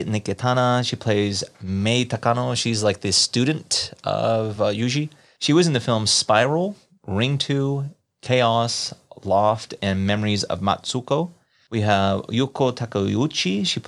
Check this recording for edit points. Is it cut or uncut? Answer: uncut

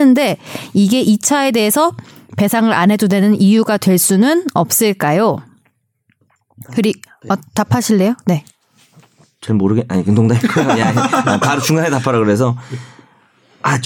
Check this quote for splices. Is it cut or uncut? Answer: uncut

